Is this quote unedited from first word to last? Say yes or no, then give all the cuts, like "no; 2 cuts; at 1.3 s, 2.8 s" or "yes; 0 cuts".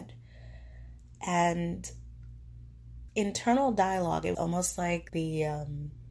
no; 3 cuts; at 3.1 s, 4.3 s, 5.1 s